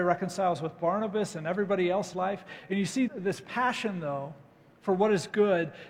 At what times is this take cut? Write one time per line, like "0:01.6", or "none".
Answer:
0:02.1
0:03.1